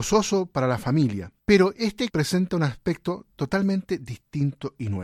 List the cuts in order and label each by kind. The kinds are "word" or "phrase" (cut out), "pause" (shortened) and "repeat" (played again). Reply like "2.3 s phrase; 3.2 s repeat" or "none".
1.4 s pause; 2.1 s word

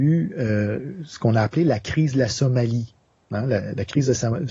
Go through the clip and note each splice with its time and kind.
none

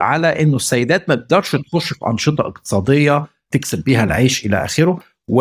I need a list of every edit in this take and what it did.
none

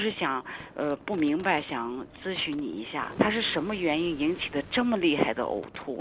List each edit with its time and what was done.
3.2 s word

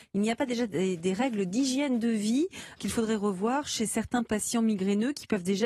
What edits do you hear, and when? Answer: 2.8 s word

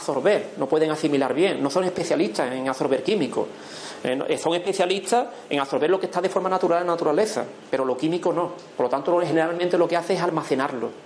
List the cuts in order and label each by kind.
none

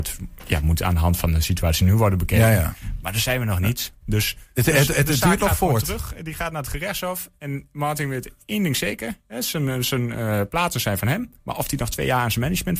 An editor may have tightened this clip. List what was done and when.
11.4 s pause

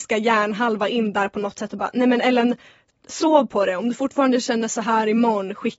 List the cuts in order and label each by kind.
none

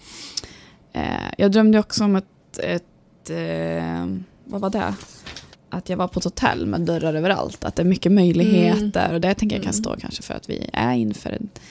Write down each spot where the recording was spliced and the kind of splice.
5.5 s pause

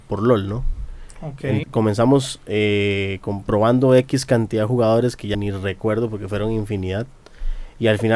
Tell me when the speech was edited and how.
1.6 s word; 5.3 s word

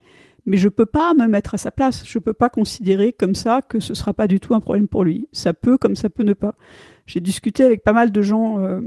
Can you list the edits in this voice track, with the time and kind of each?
none

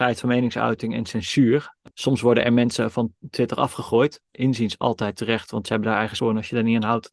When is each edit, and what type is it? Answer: 1.9 s pause; 4.3 s phrase; 6.2 s word

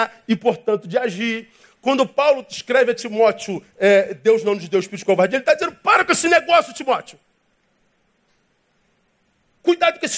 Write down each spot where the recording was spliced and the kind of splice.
none

